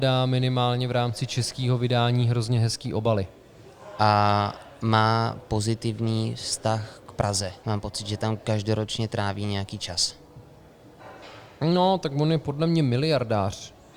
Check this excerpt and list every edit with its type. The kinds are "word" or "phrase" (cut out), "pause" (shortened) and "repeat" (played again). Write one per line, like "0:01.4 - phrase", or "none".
0:07.6 - pause